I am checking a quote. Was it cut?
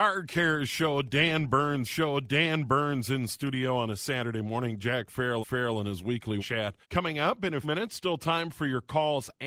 yes; 5 cuts; at 1.9 s, 5.4 s, 6.4 s, 6.8 s, 7.6 s

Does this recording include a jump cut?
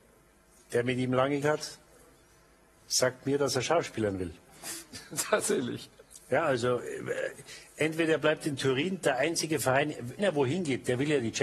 yes; 2 cuts; at 1.4 s, 10.2 s

